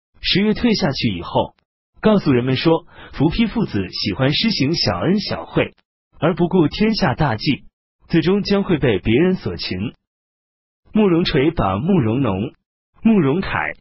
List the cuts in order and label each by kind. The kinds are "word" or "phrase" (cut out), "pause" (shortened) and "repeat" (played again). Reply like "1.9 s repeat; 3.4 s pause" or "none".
none